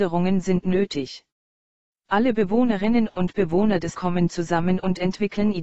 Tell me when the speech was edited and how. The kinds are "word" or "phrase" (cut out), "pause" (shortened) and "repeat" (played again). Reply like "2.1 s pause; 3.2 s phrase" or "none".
3.9 s word